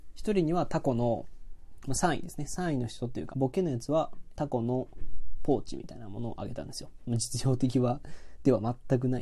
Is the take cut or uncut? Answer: cut